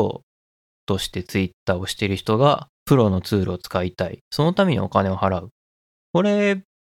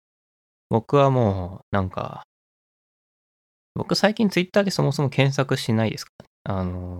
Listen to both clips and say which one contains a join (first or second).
first